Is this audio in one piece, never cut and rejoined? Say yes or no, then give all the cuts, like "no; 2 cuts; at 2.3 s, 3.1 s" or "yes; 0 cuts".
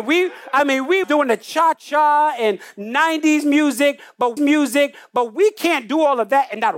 no; 3 cuts; at 1.0 s, 1.7 s, 4.4 s